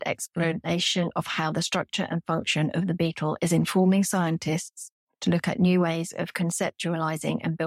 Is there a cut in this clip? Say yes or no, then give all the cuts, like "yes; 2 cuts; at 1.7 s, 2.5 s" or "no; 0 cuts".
no; 0 cuts